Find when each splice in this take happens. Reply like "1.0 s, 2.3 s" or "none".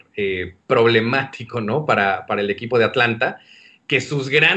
none